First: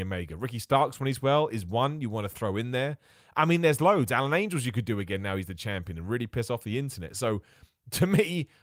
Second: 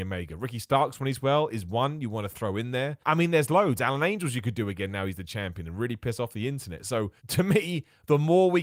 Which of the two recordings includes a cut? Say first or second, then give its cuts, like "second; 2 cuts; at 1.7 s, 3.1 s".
second; 2 cuts; at 3.0 s, 7.2 s